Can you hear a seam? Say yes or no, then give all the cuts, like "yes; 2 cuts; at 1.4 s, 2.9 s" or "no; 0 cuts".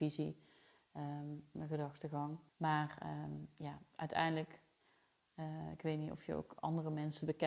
yes; 1 cut; at 2.5 s